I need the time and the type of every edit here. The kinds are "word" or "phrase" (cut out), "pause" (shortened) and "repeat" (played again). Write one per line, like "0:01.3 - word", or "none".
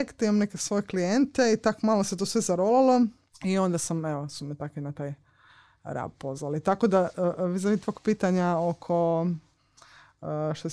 0:03.3 - pause